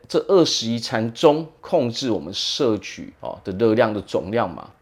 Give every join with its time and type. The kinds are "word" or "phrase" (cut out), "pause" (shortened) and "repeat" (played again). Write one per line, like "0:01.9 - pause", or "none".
0:03.1 - pause